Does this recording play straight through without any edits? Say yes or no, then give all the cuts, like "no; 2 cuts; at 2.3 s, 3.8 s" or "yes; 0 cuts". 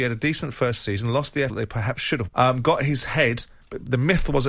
no; 2 cuts; at 1.5 s, 2.3 s